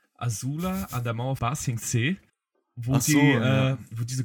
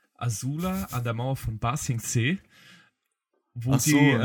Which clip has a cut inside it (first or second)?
first